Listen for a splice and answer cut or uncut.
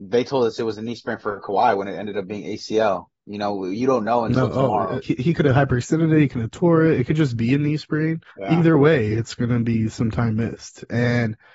cut